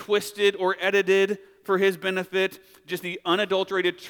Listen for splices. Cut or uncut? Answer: uncut